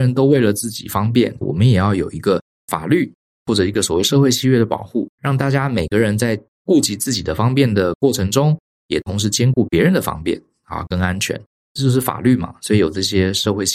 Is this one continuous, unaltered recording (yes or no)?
no